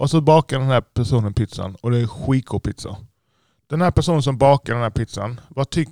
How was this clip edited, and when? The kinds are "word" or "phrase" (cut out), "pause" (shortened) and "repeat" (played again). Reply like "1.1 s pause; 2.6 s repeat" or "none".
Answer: none